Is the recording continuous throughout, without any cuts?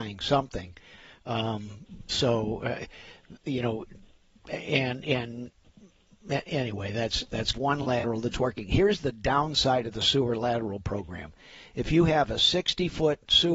no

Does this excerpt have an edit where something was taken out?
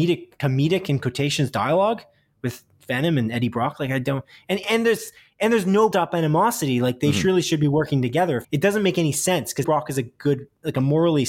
yes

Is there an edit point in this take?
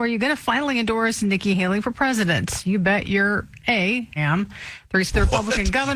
yes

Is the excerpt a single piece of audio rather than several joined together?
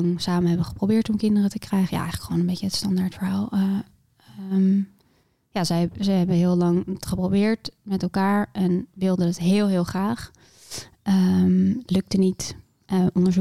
yes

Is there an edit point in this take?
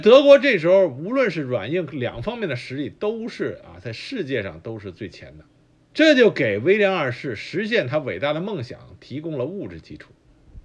yes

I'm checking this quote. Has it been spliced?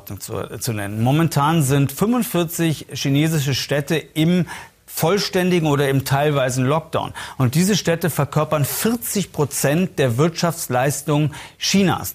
no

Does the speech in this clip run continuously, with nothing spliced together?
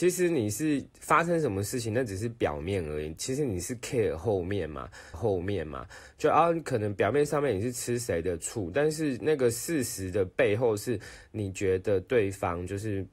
no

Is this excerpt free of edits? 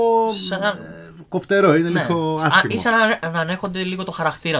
yes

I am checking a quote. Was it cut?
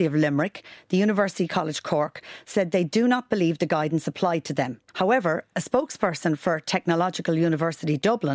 yes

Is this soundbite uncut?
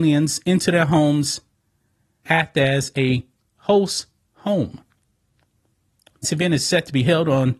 no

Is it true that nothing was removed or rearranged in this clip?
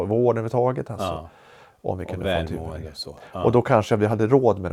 yes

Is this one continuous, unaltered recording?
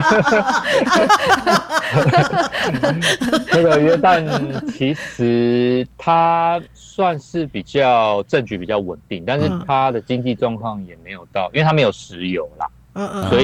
no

